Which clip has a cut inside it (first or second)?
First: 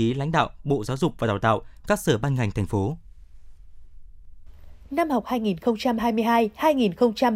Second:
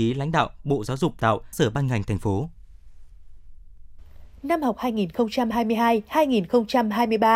second